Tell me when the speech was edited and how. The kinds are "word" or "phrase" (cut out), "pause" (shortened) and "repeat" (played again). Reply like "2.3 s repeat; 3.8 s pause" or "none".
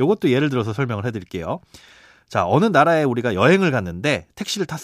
none